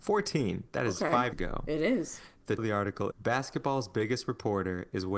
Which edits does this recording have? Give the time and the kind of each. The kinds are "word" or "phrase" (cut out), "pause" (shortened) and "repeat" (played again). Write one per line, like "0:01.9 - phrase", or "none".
0:01.3 - word
0:02.6 - word
0:03.1 - word

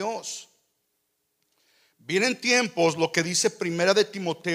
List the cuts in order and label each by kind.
none

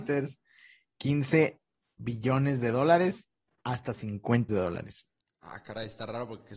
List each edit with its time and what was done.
0:04.5 - word

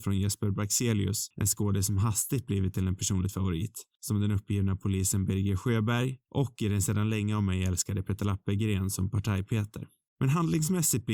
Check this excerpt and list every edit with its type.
none

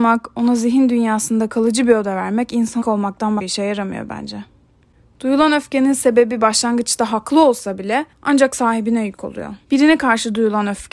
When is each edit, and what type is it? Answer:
0:02.8 - word
0:03.4 - word
0:08.1 - pause
0:09.6 - pause

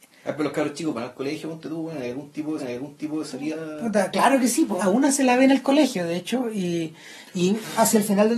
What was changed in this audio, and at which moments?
0:02.6 - repeat
0:04.8 - phrase

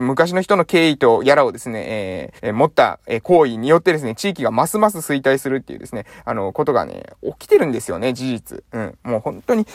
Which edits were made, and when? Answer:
0:02.4 - pause

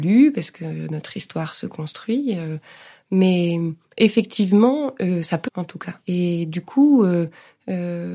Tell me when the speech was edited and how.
0:03.8 - pause
0:05.5 - word
0:06.0 - pause

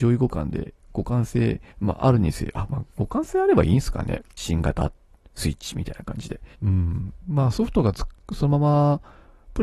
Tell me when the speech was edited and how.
0:01.7 - pause
0:06.5 - pause

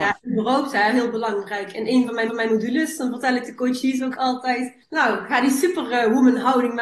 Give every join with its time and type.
0:02.3 - repeat
0:04.8 - pause

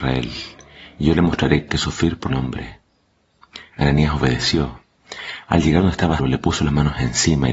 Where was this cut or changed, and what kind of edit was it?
0:01.7 - phrase
0:02.3 - word
0:06.2 - word

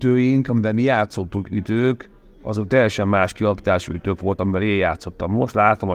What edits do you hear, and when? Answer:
none

